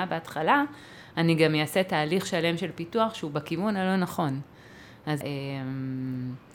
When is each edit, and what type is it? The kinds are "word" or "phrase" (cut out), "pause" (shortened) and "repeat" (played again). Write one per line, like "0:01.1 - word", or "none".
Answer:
0:05.2 - phrase